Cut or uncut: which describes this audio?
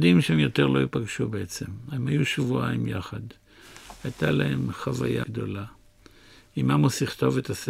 cut